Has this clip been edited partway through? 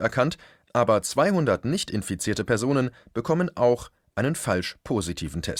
no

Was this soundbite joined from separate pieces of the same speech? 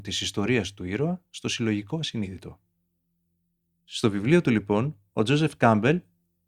no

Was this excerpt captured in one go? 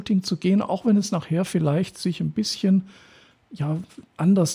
yes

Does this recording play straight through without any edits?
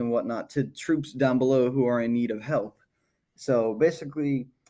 yes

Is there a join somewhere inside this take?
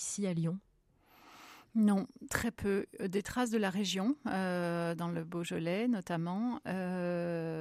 no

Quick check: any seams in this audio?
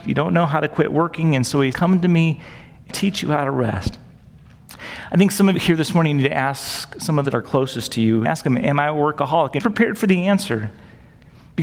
yes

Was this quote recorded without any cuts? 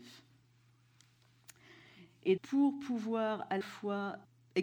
no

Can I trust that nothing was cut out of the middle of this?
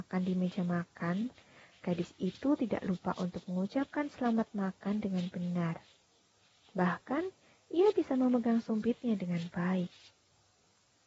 yes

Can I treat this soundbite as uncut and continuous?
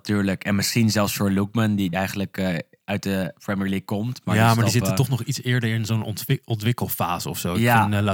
no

